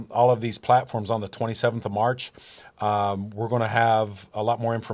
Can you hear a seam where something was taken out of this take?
no; 0 cuts

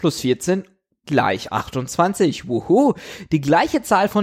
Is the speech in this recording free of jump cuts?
yes; 0 cuts

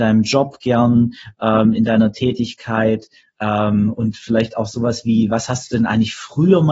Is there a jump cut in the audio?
no; 0 cuts

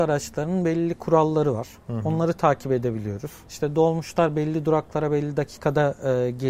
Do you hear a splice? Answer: no; 0 cuts

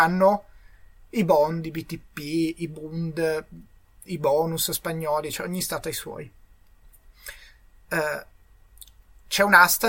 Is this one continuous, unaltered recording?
yes; 0 cuts

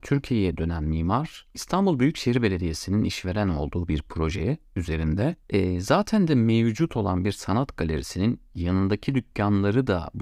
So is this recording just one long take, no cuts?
no; 1 cut; at 5.4 s

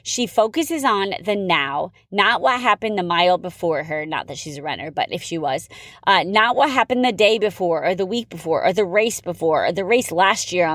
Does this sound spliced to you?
no; 0 cuts

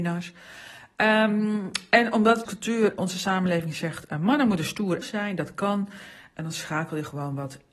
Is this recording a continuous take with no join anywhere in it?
no; 3 cuts; at 2.4 s, 3.0 s, 5.0 s

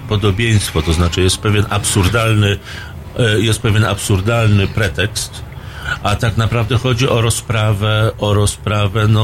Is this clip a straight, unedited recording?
yes; 0 cuts

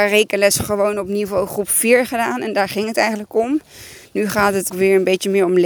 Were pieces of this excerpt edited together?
yes; 1 cut; at 4.7 s

